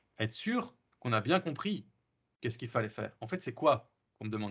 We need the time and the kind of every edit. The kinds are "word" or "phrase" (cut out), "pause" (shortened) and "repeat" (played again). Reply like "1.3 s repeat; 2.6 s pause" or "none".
none

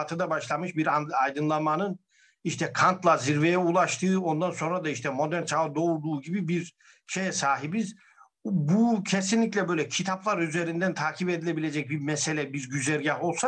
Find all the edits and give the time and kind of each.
none

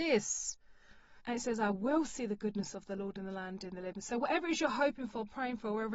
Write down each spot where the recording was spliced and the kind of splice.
1.2 s pause

